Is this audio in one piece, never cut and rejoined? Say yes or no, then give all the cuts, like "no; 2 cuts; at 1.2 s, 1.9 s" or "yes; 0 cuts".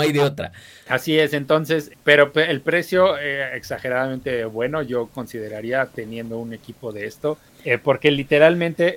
no; 2 cuts; at 1.9 s, 7.5 s